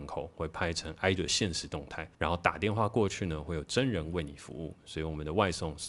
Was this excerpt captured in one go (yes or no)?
no